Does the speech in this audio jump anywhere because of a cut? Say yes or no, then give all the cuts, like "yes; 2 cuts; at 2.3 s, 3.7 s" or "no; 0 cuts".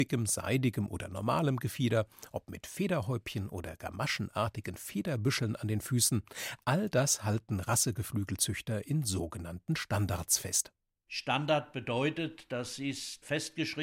no; 0 cuts